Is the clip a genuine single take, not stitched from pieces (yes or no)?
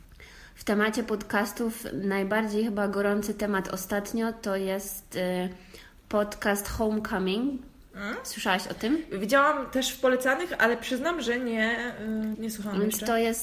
no